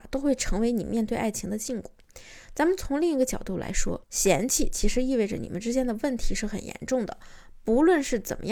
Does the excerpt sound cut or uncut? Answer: cut